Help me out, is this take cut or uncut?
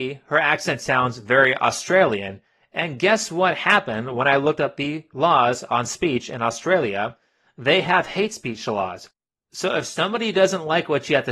uncut